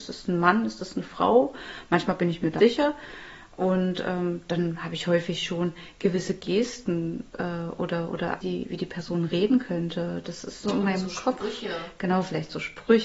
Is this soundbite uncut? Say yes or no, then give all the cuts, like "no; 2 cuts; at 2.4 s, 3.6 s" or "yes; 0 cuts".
no; 4 cuts; at 2.6 s, 7.3 s, 8.4 s, 10.6 s